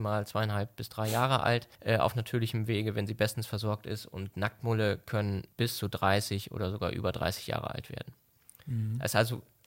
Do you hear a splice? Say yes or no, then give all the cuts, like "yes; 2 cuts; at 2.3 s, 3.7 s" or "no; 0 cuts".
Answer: no; 0 cuts